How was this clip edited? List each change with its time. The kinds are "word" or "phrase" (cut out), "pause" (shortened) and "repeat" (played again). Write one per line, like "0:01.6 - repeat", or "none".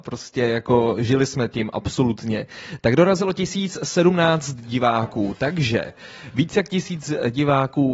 none